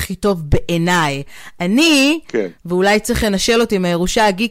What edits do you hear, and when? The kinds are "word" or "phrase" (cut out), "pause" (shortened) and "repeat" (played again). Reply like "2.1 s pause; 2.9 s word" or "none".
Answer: none